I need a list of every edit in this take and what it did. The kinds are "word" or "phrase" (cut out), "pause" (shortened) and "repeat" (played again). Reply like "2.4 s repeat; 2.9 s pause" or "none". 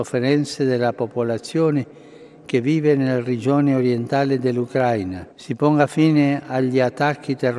5.3 s pause